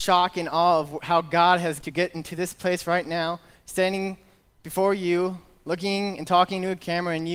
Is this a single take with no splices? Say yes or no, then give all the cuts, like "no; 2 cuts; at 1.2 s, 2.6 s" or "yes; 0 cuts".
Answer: no; 1 cut; at 1.8 s